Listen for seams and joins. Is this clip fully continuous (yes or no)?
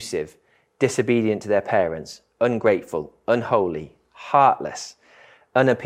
yes